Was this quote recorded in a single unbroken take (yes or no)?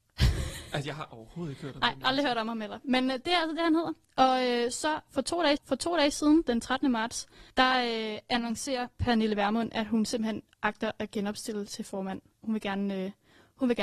no